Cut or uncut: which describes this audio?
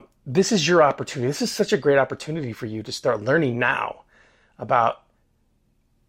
uncut